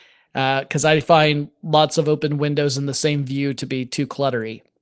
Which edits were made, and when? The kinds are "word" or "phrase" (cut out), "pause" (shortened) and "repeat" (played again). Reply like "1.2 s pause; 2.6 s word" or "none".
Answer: none